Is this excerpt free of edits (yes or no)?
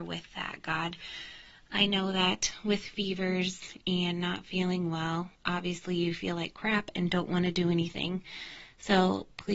no